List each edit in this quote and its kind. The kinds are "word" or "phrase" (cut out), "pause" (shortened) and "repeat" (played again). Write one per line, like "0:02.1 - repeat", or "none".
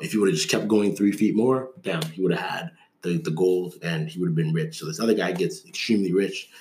none